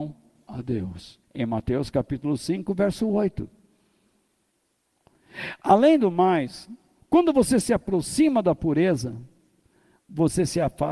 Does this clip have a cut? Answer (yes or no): yes